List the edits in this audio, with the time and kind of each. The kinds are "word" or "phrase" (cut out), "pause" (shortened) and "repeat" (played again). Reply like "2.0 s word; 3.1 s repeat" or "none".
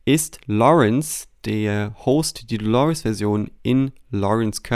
none